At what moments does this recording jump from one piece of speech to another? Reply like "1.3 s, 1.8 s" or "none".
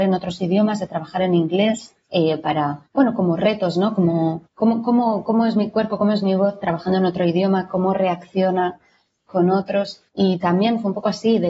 2.0 s, 2.9 s, 4.5 s, 10.1 s